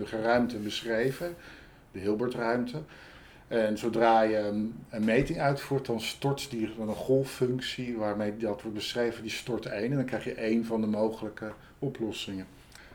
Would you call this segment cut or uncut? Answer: uncut